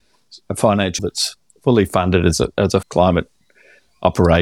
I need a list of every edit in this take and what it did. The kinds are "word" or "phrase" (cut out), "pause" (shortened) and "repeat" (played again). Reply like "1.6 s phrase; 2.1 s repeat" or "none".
1.0 s word; 2.8 s phrase